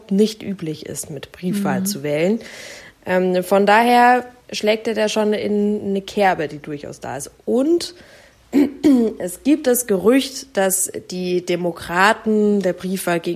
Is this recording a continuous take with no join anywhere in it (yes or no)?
yes